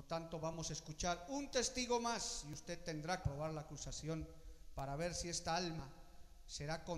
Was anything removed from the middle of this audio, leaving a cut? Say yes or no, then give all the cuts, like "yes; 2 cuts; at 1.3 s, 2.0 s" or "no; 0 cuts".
yes; 1 cut; at 3.2 s